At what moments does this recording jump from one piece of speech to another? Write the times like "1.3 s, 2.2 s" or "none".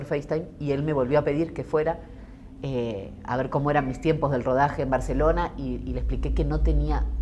none